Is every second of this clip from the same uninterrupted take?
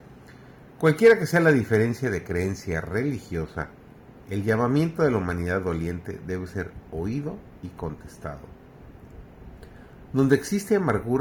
yes; 0 cuts

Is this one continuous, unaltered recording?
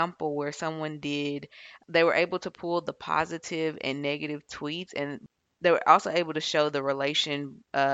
yes; 0 cuts

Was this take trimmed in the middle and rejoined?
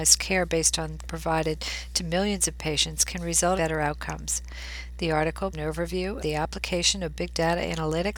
yes; 4 cuts; at 1.0 s, 3.6 s, 5.5 s, 6.2 s

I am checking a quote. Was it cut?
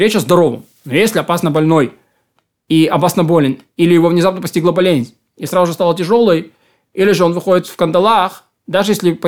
no; 0 cuts

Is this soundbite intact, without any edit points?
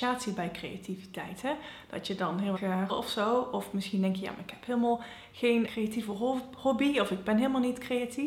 no; 3 cuts; at 2.6 s, 2.9 s, 5.7 s

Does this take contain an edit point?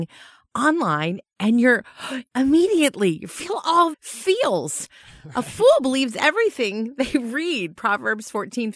yes; 2 cuts; at 2.3 s, 3.9 s

